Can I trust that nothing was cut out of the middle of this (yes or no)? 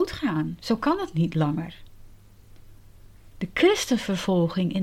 yes